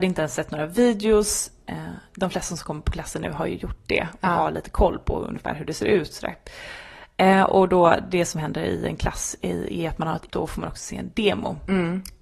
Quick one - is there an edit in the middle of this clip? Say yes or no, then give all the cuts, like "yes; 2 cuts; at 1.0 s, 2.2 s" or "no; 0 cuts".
yes; 1 cut; at 10.3 s